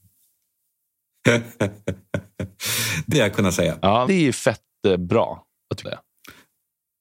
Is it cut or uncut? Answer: cut